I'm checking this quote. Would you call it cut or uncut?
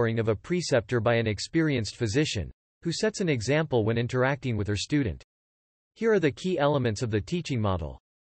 uncut